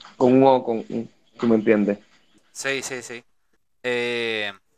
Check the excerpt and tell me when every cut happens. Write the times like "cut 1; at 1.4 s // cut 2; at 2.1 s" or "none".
none